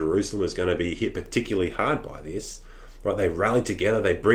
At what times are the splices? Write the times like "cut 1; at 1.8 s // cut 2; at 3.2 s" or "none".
none